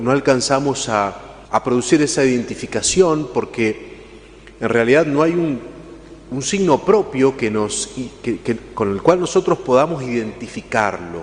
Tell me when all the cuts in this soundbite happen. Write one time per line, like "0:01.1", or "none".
0:01.4